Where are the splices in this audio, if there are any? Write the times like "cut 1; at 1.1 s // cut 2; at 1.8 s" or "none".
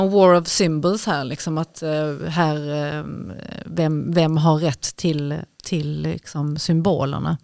none

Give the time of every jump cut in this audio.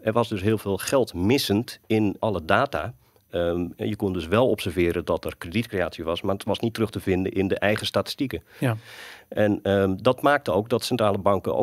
cut 1; at 2.2 s

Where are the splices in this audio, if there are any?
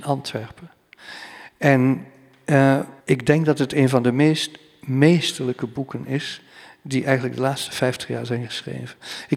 cut 1; at 3.0 s

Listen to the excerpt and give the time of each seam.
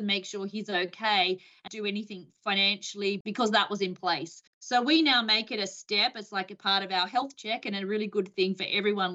cut 1; at 1.7 s // cut 2; at 4.5 s

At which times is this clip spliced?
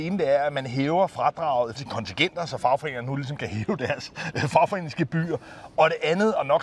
cut 1; at 1.8 s

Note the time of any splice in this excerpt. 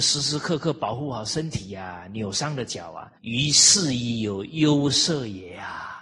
cut 1; at 3.2 s

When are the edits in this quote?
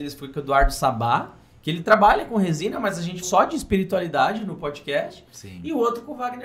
cut 1; at 3.2 s

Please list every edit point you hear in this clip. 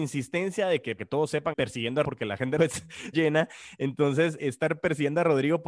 cut 1; at 1.0 s // cut 2; at 1.5 s // cut 3; at 2.0 s // cut 4; at 2.6 s // cut 5; at 3.1 s // cut 6; at 4.4 s

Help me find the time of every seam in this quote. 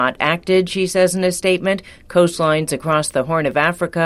none

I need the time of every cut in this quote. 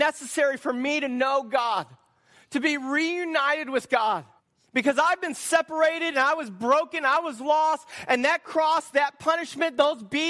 cut 1; at 4.4 s

